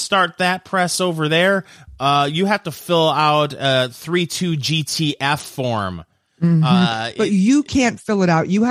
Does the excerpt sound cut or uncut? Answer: uncut